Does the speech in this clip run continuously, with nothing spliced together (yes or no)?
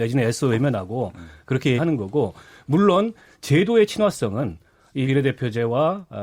no